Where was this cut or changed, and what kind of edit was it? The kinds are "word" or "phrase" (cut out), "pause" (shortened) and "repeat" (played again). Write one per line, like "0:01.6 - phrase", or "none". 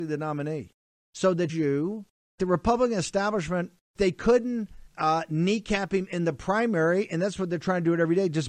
0:01.5 - phrase
0:02.4 - phrase
0:04.0 - word
0:04.9 - pause

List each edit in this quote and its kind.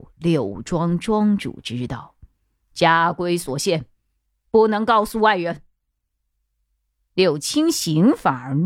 none

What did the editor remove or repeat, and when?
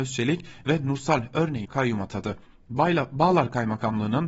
0:01.6 - word

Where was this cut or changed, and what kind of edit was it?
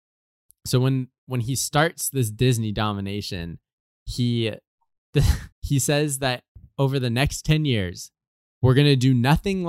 0:05.5 - pause

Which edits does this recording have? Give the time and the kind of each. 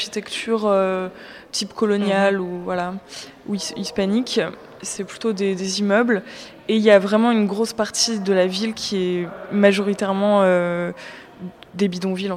none

